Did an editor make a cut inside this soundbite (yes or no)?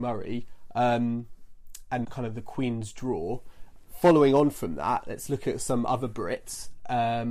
yes